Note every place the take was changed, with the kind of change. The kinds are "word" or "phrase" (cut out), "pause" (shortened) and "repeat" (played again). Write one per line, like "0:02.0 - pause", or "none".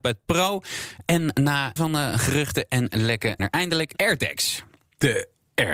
0:01.8 - word
0:03.4 - word
0:04.0 - word